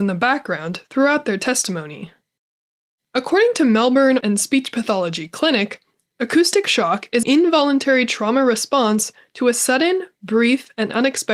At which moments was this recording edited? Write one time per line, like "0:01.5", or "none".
0:04.2
0:07.2